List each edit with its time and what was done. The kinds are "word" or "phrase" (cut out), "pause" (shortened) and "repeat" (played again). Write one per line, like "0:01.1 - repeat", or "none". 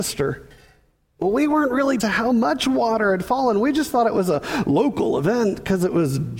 0:02.0 - phrase